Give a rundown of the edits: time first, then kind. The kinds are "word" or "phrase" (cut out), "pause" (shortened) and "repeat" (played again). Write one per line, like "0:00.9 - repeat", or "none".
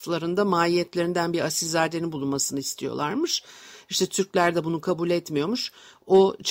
none